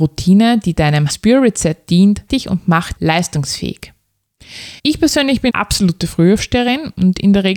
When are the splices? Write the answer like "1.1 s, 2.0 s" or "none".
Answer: 1.1 s, 2.3 s, 3.0 s, 4.8 s, 5.5 s